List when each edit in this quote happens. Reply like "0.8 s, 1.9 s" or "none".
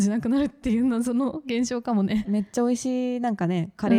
2.2 s